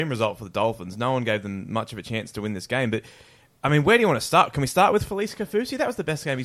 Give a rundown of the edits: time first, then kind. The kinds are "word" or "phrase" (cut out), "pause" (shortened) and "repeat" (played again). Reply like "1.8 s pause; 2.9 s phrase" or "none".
none